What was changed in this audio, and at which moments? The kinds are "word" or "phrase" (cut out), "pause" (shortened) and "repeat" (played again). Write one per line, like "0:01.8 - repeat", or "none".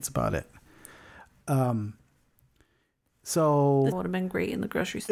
0:03.9 - word